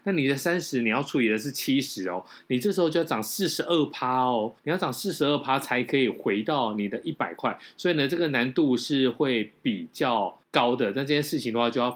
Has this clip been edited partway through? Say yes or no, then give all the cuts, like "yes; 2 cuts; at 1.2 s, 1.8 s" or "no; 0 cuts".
yes; 2 cuts; at 4.6 s, 10.4 s